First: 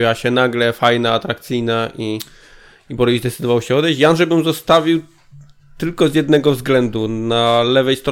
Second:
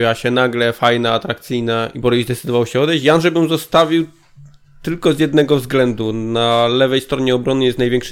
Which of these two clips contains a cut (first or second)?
second